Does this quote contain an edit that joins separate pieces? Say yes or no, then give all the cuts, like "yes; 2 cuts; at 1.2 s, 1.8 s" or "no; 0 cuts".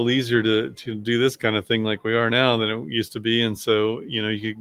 no; 0 cuts